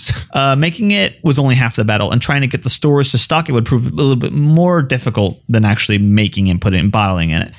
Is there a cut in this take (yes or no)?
no